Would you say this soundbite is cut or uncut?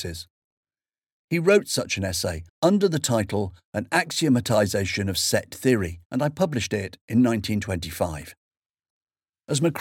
cut